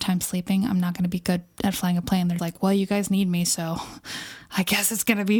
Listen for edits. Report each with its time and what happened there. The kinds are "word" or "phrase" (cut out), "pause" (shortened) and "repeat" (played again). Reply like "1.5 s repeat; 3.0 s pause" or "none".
2.4 s word